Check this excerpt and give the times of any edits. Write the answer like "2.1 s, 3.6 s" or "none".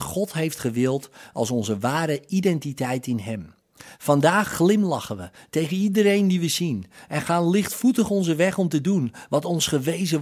none

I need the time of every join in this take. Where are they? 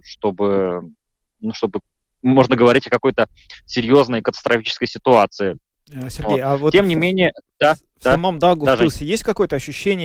none

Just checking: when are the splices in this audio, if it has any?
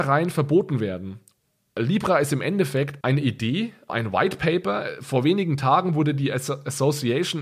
3.0 s, 3.9 s

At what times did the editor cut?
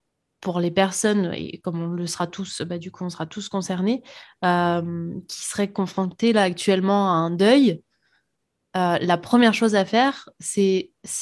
none

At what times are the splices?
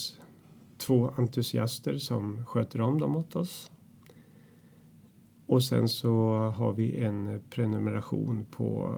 none

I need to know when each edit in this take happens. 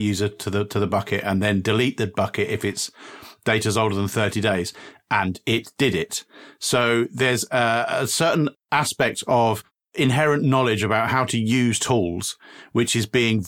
none

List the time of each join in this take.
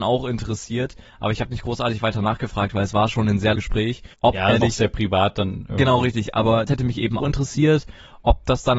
3.5 s, 4.1 s, 4.6 s, 6.7 s, 7.2 s

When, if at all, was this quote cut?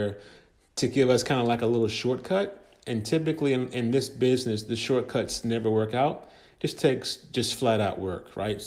none

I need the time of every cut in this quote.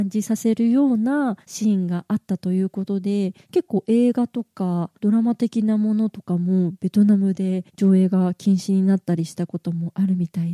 1.4 s, 3.4 s, 5.0 s, 7.7 s

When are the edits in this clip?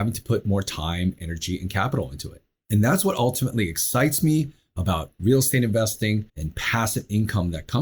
6.3 s

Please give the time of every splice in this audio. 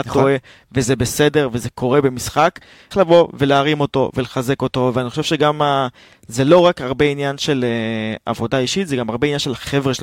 2.9 s

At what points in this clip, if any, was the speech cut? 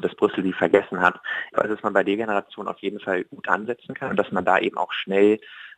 1.5 s

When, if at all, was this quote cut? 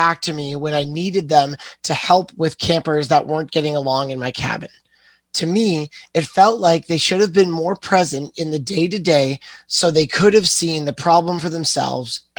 none

